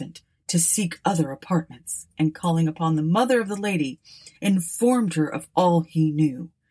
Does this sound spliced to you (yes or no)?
yes